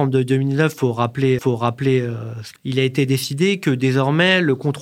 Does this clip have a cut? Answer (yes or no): yes